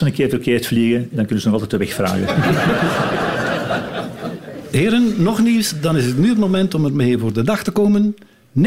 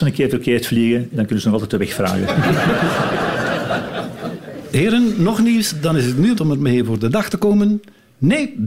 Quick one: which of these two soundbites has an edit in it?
second; 1 cut; at 6.4 s

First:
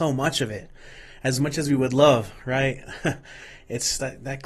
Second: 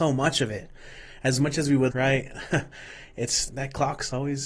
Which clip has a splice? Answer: second; 2 cuts; at 1.9 s, 3.5 s

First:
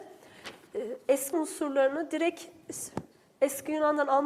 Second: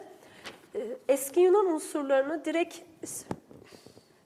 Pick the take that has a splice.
first; 2 cuts; at 1.3 s, 3.1 s

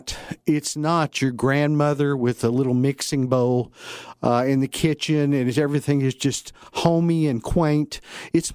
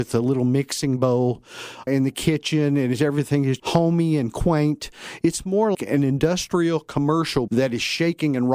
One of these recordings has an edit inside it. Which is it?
second; 4 cuts; at 1.9 s, 3.6 s, 5.7 s, 7.5 s

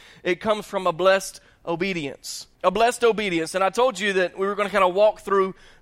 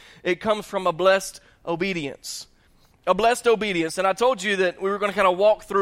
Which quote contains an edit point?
first; 1 cut; at 2.5 s

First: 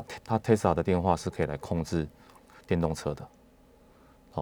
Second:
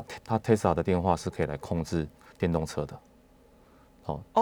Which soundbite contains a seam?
second; 1 cut; at 2.2 s

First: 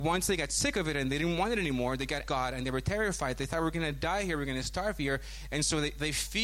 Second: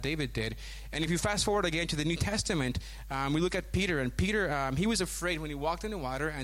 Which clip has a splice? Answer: first; 1 cut; at 2.3 s

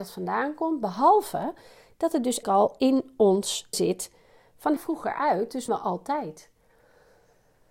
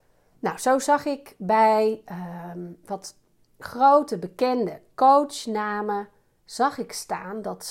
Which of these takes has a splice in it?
first; 4 cuts; at 2.4 s, 3.7 s, 4.8 s, 5.7 s

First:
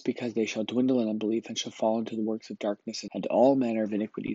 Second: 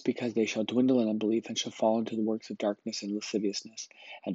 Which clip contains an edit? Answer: first; 1 cut; at 3.1 s

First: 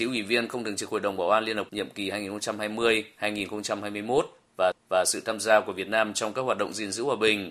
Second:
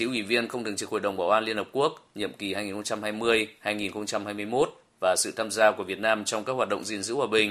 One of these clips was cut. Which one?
first; 2 cuts; at 1.7 s, 4.7 s

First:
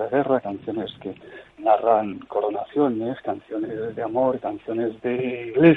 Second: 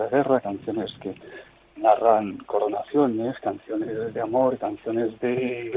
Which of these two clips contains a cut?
first; 1 cut; at 1.5 s

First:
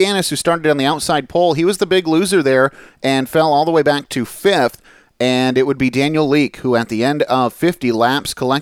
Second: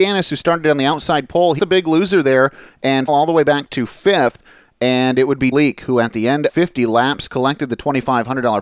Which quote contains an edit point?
second; 4 cuts; at 1.6 s, 3.1 s, 5.5 s, 6.5 s

